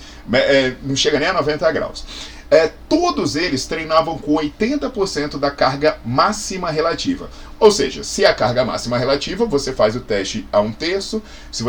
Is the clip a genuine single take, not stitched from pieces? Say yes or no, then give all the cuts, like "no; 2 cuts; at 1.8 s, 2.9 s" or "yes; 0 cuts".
yes; 0 cuts